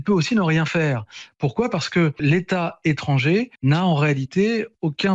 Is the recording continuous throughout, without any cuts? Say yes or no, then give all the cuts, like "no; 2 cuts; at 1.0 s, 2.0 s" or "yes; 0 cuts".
no; 1 cut; at 3.5 s